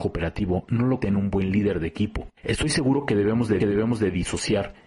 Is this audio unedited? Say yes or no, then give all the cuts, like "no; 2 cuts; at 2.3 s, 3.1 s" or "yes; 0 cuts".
no; 3 cuts; at 1.0 s, 2.4 s, 3.6 s